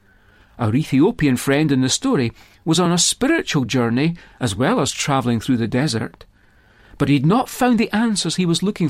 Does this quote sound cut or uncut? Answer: uncut